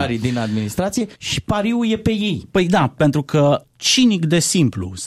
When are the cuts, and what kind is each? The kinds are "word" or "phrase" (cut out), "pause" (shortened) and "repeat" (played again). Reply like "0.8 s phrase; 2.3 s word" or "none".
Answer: 1.1 s pause; 3.6 s phrase